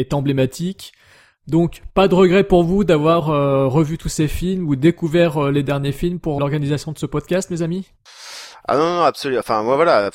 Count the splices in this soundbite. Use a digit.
1